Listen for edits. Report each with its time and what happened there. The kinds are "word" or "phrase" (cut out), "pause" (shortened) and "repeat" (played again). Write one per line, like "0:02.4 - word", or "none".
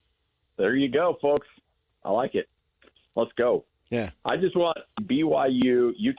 0:05.0 - phrase